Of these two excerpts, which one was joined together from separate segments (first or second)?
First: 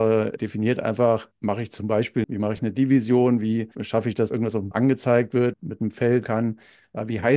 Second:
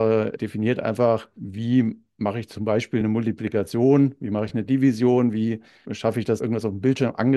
first